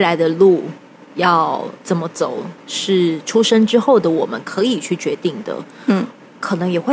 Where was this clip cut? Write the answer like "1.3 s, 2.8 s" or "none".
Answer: 1.8 s, 2.6 s